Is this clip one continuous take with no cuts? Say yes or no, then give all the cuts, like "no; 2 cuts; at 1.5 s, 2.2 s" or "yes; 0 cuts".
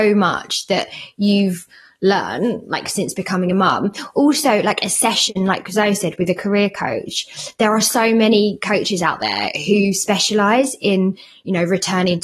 yes; 0 cuts